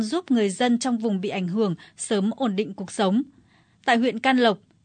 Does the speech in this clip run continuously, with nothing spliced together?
yes; 0 cuts

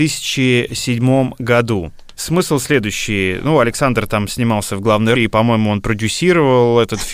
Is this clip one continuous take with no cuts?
no; 1 cut; at 5.1 s

